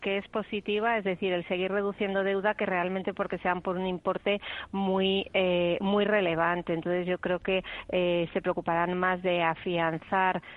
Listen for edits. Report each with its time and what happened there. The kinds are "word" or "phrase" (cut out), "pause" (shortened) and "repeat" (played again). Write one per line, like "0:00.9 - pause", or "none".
none